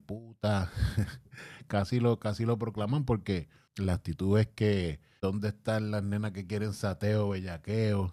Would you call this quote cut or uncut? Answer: uncut